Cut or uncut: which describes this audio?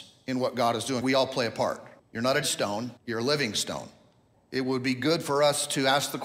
cut